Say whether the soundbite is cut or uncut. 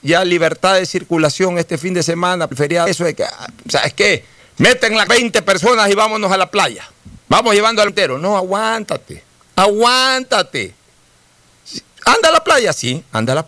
cut